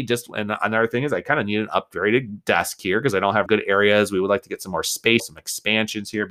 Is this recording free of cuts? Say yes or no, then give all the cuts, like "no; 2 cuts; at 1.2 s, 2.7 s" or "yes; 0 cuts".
no; 2 cuts; at 3.5 s, 5.2 s